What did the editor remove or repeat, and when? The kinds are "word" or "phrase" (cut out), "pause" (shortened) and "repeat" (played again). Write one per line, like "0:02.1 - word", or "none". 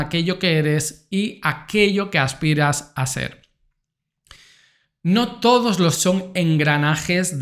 0:06.0 - word